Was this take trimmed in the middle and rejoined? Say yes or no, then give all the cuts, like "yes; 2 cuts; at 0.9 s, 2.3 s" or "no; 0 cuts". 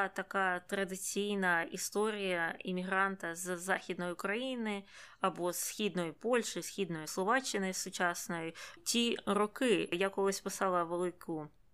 yes; 1 cut; at 8.8 s